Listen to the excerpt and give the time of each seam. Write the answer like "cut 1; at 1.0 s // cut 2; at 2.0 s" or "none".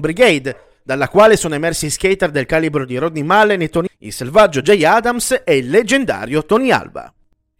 cut 1; at 3.9 s